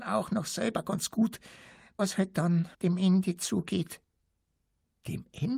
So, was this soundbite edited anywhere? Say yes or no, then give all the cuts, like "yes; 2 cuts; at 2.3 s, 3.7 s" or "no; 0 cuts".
yes; 2 cuts; at 2.0 s, 2.7 s